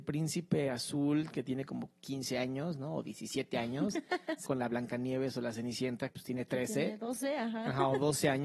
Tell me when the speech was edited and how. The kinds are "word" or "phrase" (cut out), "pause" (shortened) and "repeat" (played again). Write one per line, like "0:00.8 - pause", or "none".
0:02.0 - pause
0:04.5 - word
0:06.1 - word